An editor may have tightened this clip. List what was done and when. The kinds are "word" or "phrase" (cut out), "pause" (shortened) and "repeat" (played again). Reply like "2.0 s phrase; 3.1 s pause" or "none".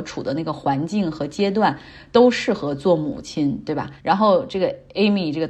4.0 s pause